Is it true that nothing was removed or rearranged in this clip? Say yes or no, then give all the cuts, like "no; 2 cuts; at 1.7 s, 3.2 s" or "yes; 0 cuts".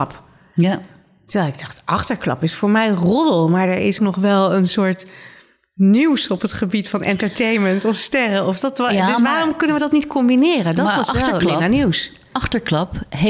no; 1 cut; at 4.0 s